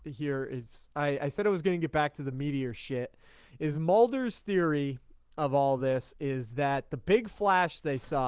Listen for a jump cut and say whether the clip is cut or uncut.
uncut